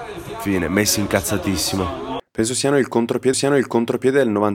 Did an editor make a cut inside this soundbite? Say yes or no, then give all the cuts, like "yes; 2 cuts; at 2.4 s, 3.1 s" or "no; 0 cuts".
yes; 1 cut; at 3.3 s